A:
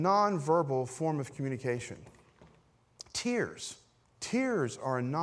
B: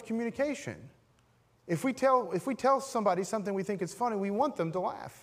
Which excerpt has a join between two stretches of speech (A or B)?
A